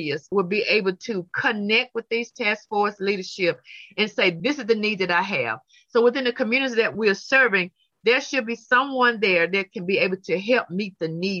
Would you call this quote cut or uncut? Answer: uncut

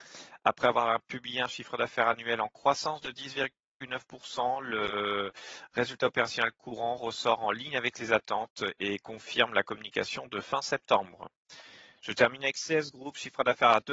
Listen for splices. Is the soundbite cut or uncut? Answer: uncut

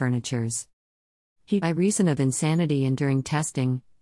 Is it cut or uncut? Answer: cut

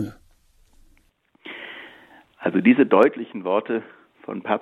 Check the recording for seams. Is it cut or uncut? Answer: uncut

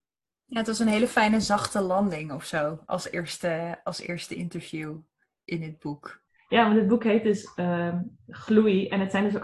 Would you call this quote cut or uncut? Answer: uncut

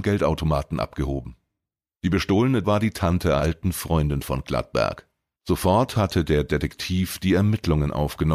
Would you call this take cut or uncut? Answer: cut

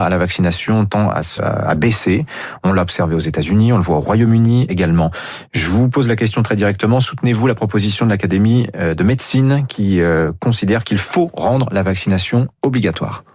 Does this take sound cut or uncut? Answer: cut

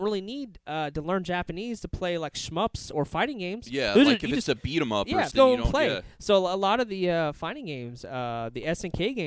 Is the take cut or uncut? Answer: cut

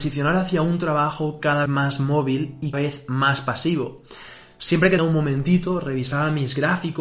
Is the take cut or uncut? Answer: cut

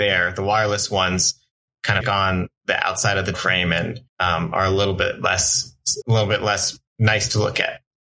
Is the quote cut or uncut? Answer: cut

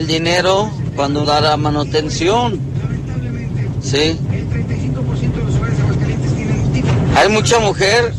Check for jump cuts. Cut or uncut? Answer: cut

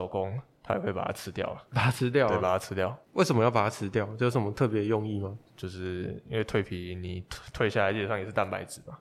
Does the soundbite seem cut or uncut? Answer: cut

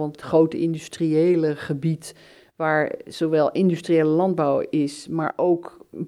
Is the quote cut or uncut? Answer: uncut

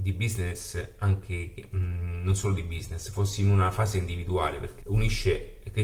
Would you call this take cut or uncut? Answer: cut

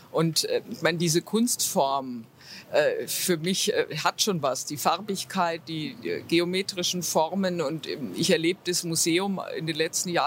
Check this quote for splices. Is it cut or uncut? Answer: uncut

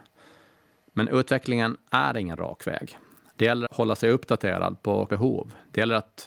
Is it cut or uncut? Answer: cut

